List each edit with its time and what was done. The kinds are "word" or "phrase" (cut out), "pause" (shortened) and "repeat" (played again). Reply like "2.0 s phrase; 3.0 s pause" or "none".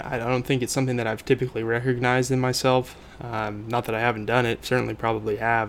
none